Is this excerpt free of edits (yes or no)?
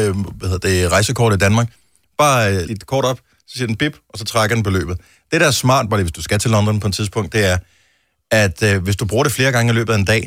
no